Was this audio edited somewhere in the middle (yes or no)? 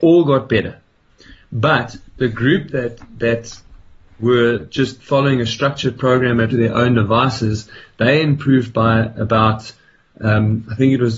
yes